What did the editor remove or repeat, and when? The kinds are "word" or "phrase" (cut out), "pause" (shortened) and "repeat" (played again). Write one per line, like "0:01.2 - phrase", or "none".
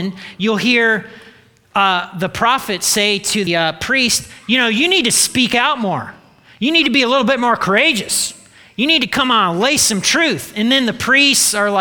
0:03.5 - word